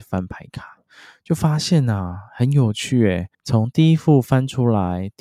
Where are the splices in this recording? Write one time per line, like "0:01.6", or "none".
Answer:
0:03.3